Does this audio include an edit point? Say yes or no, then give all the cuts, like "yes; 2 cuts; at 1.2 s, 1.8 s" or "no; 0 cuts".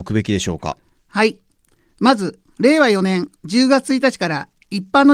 no; 0 cuts